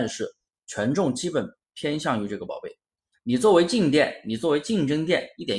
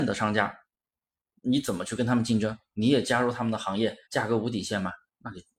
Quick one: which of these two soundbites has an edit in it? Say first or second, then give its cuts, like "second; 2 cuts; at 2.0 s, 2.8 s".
second; 1 cut; at 4.0 s